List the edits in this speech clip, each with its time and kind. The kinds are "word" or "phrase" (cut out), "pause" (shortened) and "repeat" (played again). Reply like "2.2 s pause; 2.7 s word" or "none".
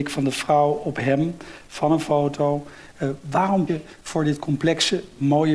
3.7 s word